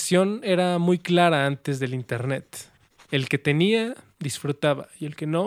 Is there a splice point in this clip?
no; 0 cuts

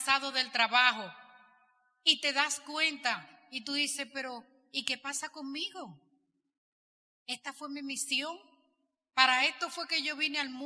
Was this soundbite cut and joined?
no; 0 cuts

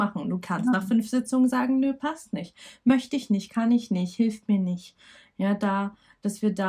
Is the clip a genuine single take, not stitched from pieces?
yes; 0 cuts

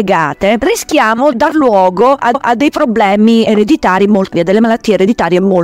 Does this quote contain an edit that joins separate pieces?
yes; 3 cuts; at 1.3 s, 2.3 s, 4.3 s

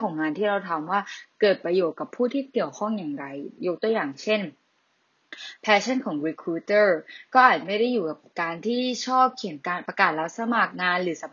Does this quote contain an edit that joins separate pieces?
no; 0 cuts

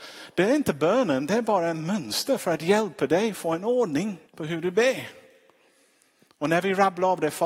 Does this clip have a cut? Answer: yes; 1 cut; at 4.3 s

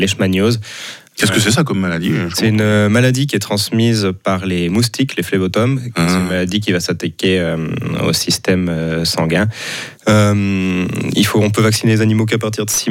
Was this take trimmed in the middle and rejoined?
yes; 1 cut; at 10.0 s

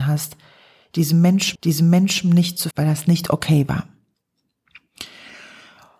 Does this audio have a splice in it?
yes; 2 cuts; at 1.5 s, 2.7 s

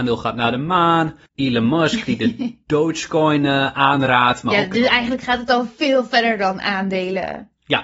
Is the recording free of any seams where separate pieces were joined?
no; 1 cut; at 1.3 s

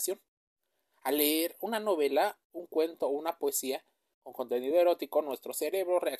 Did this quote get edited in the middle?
no; 0 cuts

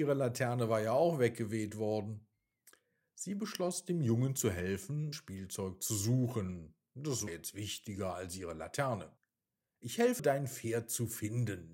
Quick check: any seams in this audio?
yes; 3 cuts; at 5.1 s, 7.3 s, 10.2 s

